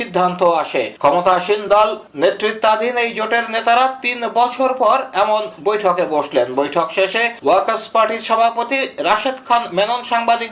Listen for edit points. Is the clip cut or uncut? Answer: uncut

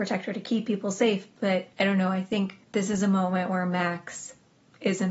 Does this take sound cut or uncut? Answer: cut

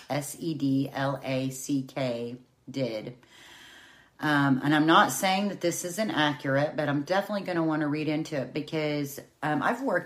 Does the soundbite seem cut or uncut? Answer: uncut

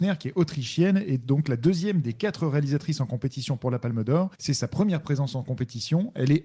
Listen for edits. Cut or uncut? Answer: cut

